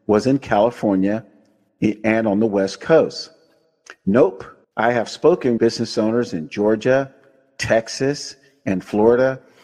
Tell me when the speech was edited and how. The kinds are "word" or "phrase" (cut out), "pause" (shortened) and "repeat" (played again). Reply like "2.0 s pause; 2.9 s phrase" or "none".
4.6 s pause; 5.6 s word